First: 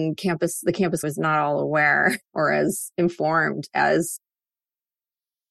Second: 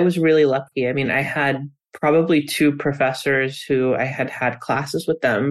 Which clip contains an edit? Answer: first; 2 cuts; at 1.0 s, 2.3 s

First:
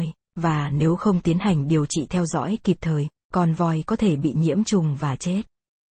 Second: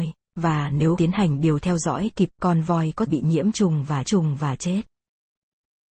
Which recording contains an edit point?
second; 5 cuts; at 1.0 s, 1.6 s, 2.3 s, 3.1 s, 4.0 s

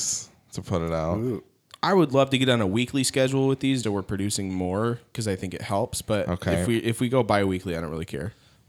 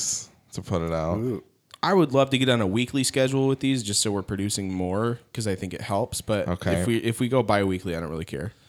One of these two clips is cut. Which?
first; 1 cut; at 3.8 s

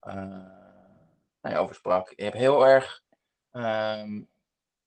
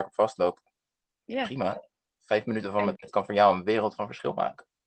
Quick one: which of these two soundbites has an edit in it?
second; 1 cut; at 3.0 s

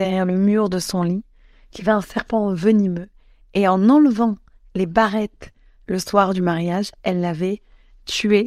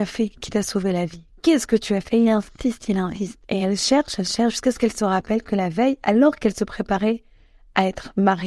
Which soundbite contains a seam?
second; 1 cut; at 3.4 s

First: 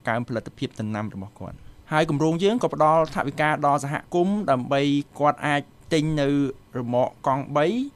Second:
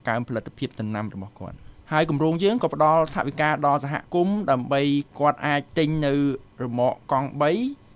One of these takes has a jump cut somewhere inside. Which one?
second; 1 cut; at 5.7 s

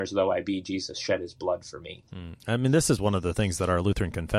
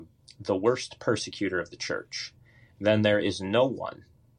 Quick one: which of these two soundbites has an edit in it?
first; 1 cut; at 2.1 s

